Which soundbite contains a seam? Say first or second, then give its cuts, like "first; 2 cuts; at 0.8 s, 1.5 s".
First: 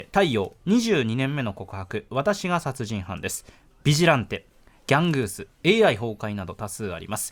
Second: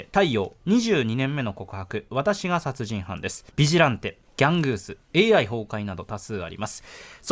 second; 2 cuts; at 3.5 s, 4.3 s